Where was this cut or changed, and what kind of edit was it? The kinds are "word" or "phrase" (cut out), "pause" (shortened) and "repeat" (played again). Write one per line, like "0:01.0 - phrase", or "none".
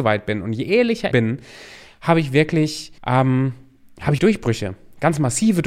0:01.1 - phrase
0:03.0 - pause
0:04.2 - word